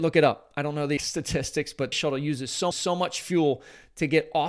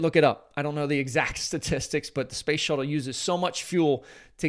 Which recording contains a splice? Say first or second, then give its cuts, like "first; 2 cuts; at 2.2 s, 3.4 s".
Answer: first; 3 cuts; at 1.0 s, 1.9 s, 2.7 s